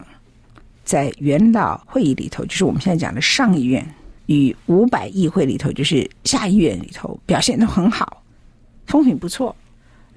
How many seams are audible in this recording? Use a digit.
3